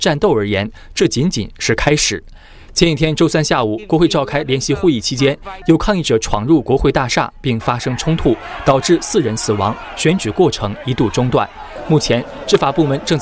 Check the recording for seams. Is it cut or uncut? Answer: uncut